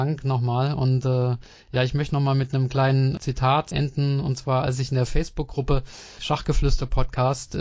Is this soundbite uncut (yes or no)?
yes